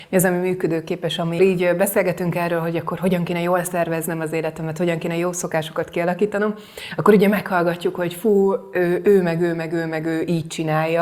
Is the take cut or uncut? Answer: cut